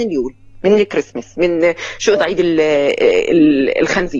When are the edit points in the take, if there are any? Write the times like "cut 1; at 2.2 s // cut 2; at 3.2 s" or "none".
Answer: cut 1; at 2.2 s